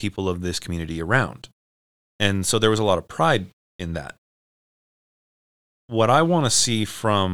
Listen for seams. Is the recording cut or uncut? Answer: uncut